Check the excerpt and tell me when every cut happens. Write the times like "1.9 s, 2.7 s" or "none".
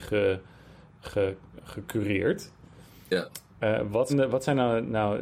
4.1 s

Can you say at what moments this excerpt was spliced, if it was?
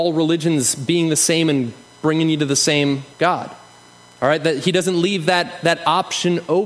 3.1 s

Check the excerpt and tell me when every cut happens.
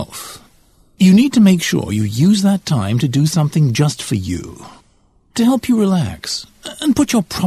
none

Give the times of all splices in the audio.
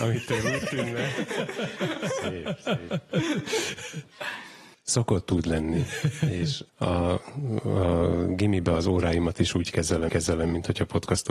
4.7 s, 6.7 s, 10.1 s

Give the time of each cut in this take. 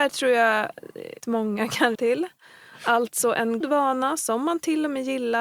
1.2 s, 1.9 s, 3.6 s

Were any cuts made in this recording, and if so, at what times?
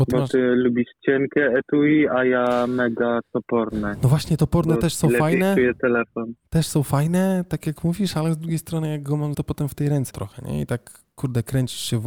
9.3 s, 10.1 s

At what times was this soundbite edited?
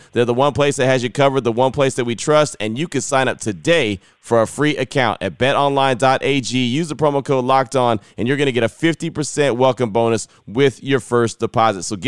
none

